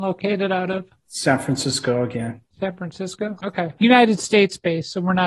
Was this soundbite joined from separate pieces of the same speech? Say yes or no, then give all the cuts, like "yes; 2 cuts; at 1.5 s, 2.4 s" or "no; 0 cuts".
yes; 1 cut; at 2.5 s